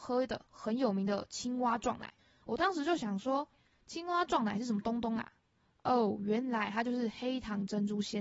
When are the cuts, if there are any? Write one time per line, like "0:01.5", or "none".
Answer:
0:02.2
0:03.5